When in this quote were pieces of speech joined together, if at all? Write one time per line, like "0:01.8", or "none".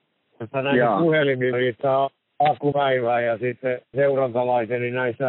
0:01.5
0:02.7
0:03.9